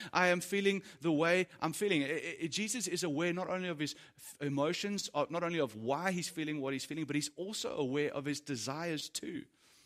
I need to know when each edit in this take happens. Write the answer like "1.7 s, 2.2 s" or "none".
none